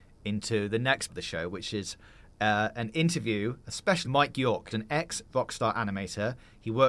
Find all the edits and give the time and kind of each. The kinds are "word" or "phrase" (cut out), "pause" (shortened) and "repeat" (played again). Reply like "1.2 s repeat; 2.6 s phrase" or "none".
1.1 s word; 4.0 s phrase; 4.7 s word